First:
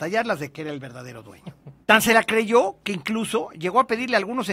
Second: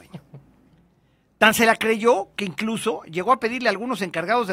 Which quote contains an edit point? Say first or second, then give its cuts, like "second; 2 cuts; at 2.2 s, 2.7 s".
first; 1 cut; at 1.8 s